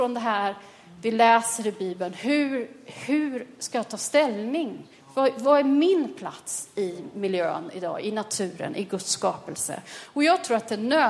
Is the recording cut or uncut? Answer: uncut